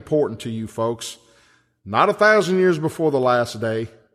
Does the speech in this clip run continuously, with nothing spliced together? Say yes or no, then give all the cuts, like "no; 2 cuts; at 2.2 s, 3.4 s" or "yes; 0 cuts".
yes; 0 cuts